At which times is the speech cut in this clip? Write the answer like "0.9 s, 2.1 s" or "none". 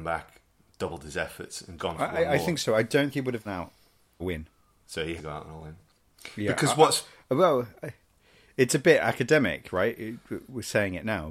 1.8 s, 3.1 s, 3.5 s, 4.2 s, 5.2 s